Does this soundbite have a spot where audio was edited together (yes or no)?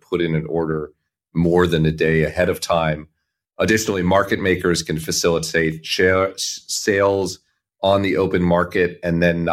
no